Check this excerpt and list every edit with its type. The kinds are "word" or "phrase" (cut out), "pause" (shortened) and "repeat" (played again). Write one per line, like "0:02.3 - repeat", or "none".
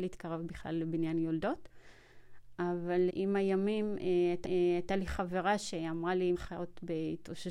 0:03.1 - word
0:04.4 - repeat
0:06.3 - word